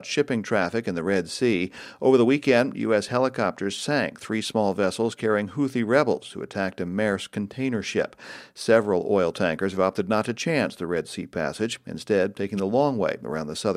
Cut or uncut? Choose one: uncut